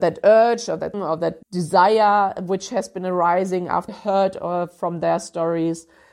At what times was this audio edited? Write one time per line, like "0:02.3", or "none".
0:00.9
0:01.4
0:03.9